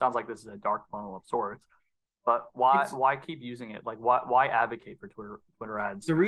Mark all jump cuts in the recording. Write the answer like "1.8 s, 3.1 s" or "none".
none